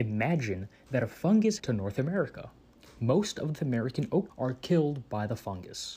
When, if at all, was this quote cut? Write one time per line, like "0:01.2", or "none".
0:01.6
0:02.6
0:03.6
0:04.3